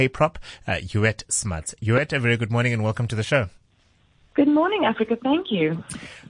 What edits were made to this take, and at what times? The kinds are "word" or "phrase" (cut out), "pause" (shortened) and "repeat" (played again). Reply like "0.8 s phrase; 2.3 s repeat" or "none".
none